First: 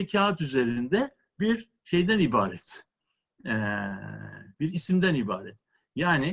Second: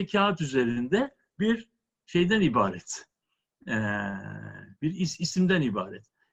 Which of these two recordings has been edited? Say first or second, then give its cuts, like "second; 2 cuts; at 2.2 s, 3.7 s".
first; 2 cuts; at 1.8 s, 4.7 s